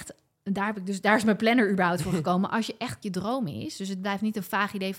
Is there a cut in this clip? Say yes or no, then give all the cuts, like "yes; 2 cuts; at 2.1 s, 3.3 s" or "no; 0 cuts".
yes; 1 cut; at 3.0 s